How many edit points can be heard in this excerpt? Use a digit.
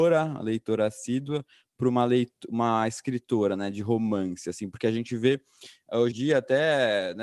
1